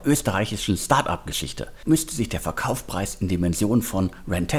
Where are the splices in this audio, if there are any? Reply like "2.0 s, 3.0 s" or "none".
1.9 s